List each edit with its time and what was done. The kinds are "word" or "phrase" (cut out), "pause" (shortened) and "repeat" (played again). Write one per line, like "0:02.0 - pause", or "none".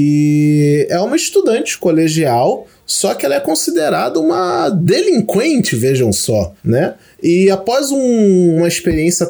none